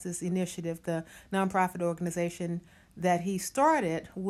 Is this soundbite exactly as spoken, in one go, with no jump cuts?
yes; 0 cuts

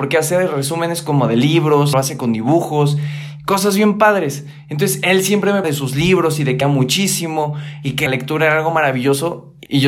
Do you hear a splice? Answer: yes; 4 cuts; at 1.9 s, 5.6 s, 6.6 s, 8.1 s

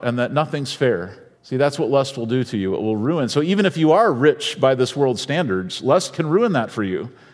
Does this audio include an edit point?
yes; 1 cut; at 1.4 s

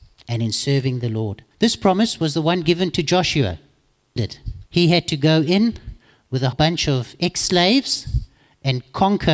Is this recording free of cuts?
no; 4 cuts; at 1.5 s, 4.2 s, 4.7 s, 6.5 s

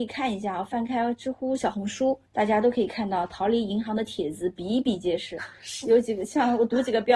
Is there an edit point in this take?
yes; 1 cut; at 2.3 s

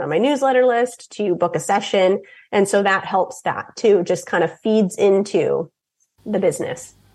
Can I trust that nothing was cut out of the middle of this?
yes; 0 cuts

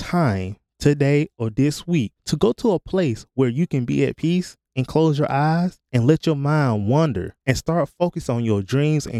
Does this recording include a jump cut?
yes; 4 cuts; at 2.2 s, 4.6 s, 5.9 s, 7.4 s

